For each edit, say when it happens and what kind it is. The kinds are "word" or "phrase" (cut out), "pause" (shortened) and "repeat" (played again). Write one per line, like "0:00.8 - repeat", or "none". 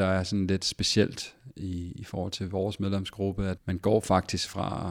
0:03.6 - word